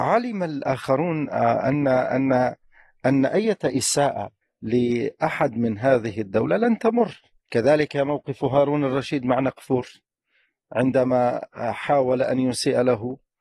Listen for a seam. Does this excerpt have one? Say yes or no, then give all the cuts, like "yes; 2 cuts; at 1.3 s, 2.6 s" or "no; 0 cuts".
yes; 2 cuts; at 4.4 s, 7.4 s